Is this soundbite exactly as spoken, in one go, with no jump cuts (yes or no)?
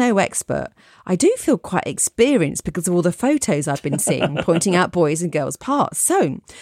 yes